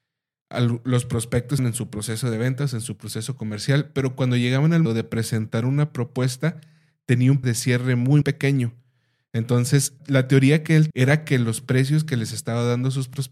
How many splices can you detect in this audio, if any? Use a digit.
6